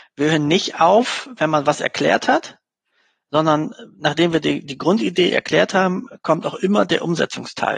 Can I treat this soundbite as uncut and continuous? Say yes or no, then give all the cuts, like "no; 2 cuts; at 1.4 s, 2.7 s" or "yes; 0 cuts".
yes; 0 cuts